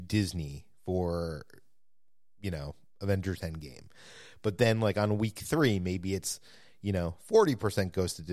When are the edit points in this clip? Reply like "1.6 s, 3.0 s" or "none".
none

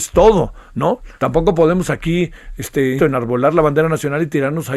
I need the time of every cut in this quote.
1.2 s, 3.0 s

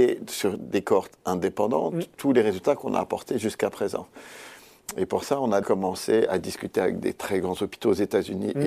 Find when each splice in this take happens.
5.6 s

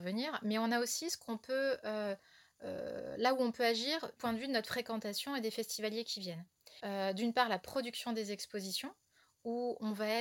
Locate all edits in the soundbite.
4.2 s

